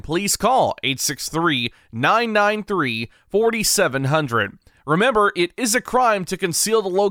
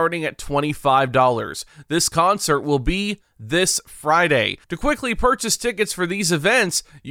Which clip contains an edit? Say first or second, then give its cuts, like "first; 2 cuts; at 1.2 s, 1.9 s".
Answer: second; 1 cut; at 4.6 s